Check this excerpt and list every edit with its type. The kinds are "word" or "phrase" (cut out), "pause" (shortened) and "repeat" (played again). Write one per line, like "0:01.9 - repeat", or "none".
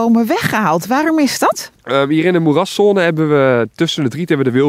0:01.8 - pause